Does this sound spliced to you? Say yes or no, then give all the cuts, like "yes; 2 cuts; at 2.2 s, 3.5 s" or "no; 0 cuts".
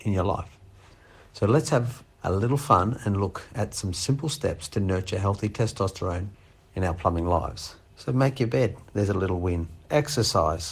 yes; 3 cuts; at 2.1 s, 6.6 s, 7.8 s